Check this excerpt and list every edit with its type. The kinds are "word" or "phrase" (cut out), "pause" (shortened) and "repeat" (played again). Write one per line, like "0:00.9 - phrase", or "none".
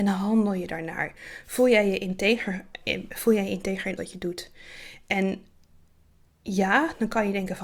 0:04.0 - word